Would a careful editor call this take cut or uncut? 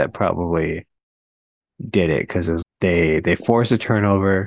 cut